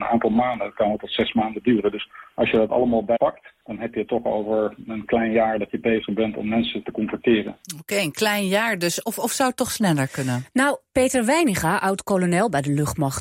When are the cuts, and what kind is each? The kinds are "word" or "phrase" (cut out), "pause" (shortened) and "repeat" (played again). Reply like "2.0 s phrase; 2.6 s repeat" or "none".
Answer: 3.2 s word